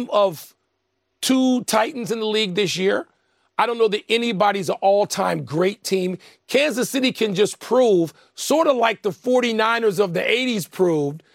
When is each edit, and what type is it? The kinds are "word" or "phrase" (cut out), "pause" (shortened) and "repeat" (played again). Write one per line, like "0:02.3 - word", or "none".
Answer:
none